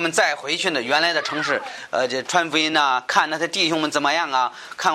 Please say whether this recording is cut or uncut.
uncut